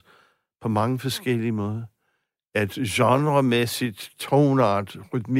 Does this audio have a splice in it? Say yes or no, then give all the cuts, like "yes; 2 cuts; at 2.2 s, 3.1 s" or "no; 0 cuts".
no; 0 cuts